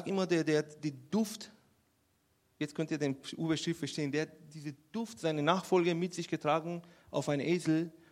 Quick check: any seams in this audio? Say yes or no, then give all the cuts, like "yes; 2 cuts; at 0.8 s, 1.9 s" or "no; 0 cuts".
no; 0 cuts